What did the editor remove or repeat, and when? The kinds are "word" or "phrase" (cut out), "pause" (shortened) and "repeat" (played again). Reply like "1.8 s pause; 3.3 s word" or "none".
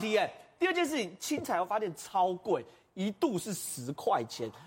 none